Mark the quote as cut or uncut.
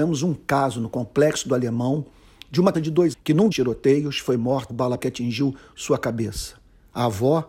cut